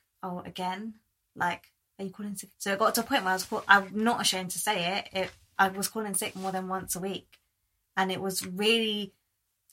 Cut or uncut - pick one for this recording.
cut